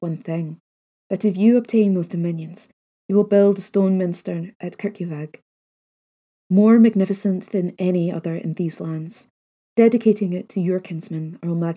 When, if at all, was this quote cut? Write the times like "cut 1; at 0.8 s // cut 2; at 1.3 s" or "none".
none

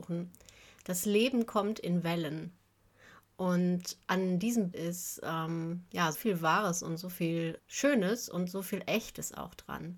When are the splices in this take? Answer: cut 1; at 4.0 s // cut 2; at 4.7 s // cut 3; at 6.1 s // cut 4; at 7.6 s

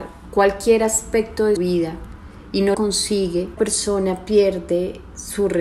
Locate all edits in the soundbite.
cut 1; at 1.6 s // cut 2; at 2.7 s // cut 3; at 3.6 s

